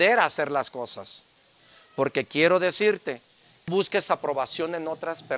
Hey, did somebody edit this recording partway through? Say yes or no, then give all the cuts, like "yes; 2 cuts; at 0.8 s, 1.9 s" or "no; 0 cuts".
yes; 1 cut; at 3.7 s